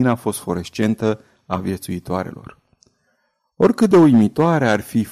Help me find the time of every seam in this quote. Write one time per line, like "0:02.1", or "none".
none